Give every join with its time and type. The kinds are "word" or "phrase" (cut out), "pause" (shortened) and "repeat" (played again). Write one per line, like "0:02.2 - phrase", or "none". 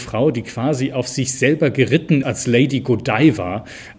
0:02.2 - word